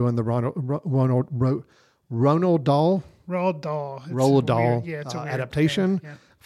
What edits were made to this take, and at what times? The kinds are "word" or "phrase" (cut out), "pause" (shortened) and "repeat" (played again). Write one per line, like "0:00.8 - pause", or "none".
none